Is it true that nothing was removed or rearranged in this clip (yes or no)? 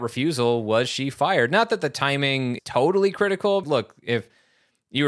no